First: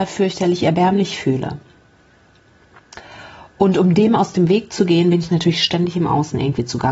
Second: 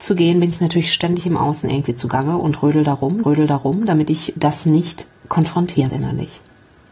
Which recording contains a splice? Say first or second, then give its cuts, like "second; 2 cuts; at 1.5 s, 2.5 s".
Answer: second; 3 cuts; at 3.2 s, 4.4 s, 5.9 s